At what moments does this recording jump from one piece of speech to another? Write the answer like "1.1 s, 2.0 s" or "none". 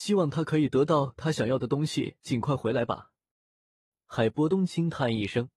none